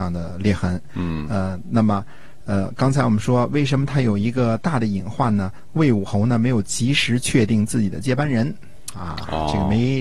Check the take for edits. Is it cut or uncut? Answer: uncut